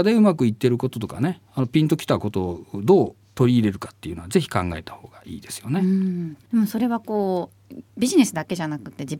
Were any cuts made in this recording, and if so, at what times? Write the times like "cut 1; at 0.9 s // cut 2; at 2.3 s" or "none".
cut 1; at 6.4 s // cut 2; at 7.9 s